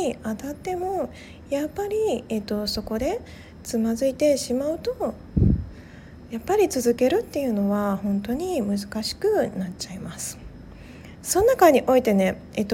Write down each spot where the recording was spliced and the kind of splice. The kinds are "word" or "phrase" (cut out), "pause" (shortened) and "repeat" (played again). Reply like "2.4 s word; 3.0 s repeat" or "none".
none